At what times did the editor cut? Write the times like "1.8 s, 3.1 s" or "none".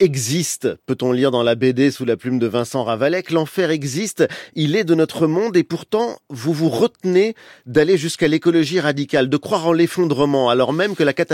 none

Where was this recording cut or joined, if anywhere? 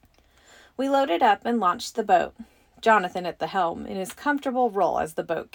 none

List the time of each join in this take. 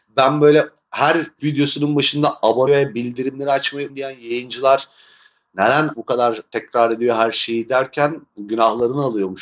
1.4 s, 2.7 s, 3.9 s, 5.9 s

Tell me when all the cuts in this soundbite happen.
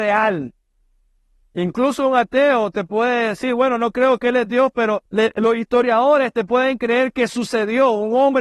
5.1 s

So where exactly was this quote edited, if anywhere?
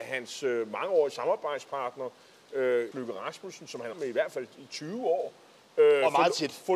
2.9 s, 3.9 s

